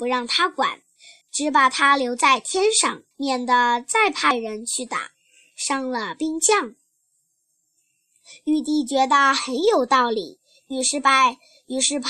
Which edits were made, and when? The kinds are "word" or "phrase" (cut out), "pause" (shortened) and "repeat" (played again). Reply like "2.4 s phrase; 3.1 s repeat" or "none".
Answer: 1.2 s pause; 3.1 s pause

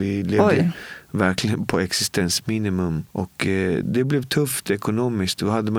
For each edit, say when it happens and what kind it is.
none

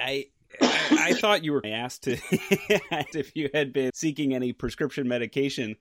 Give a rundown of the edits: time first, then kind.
1.6 s phrase; 3.1 s word; 3.9 s word

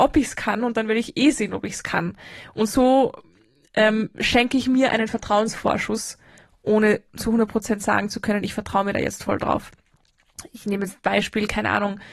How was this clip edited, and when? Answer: none

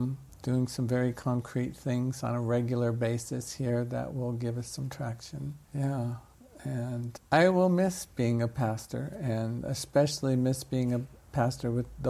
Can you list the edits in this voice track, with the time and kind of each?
5.6 s pause; 7.2 s word

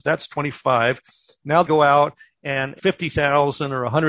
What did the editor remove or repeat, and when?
1.6 s word; 2.8 s word

